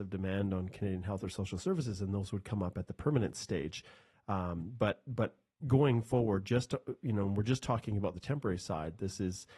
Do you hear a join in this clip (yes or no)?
no